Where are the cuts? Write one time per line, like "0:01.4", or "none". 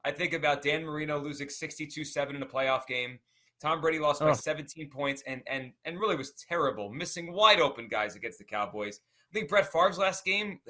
none